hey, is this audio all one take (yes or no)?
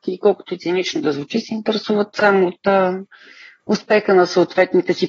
yes